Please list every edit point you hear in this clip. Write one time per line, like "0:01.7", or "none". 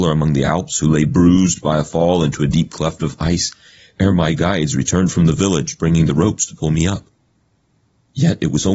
none